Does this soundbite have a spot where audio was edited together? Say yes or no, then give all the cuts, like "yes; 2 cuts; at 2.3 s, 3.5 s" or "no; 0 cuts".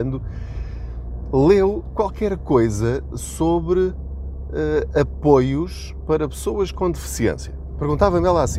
no; 0 cuts